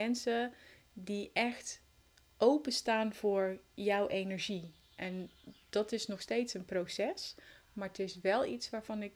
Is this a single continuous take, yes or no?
yes